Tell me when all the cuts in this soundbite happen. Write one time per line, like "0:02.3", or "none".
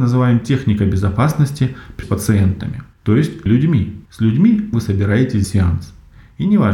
0:02.0
0:02.9
0:03.5
0:04.1
0:04.7
0:05.4